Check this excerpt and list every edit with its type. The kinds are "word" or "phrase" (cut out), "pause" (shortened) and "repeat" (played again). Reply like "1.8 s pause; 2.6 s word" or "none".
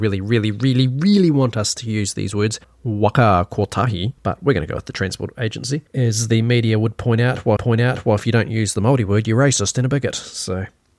2.6 s pause; 4.2 s pause; 5.9 s pause; 7.6 s repeat